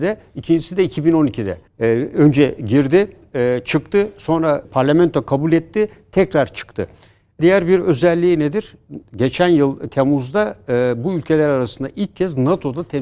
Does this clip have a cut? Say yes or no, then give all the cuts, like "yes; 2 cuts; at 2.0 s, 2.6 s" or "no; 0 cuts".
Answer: yes; 3 cuts; at 1.7 s, 4.6 s, 7.4 s